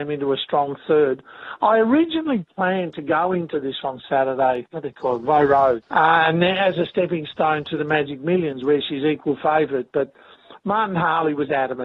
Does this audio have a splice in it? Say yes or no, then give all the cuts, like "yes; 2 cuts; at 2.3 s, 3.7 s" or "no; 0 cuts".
yes; 3 cuts; at 3.8 s, 4.7 s, 5.8 s